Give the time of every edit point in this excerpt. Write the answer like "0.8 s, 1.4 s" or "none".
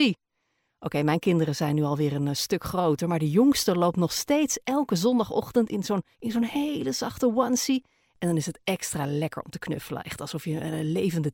6.1 s